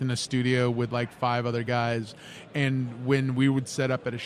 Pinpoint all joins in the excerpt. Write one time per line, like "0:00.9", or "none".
none